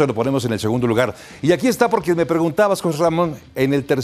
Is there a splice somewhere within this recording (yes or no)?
no